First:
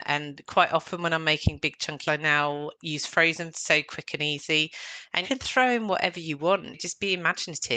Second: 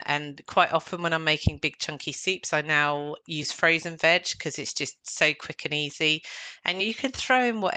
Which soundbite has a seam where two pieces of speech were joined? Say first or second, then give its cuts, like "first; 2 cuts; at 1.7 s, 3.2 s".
first; 3 cuts; at 2.1 s, 3.5 s, 5.2 s